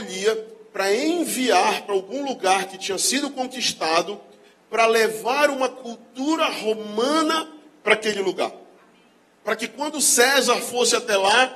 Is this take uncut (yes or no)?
yes